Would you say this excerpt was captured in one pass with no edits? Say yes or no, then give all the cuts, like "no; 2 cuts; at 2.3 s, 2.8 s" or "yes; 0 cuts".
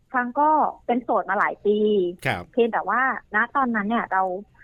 no; 2 cuts; at 2.2 s, 3.3 s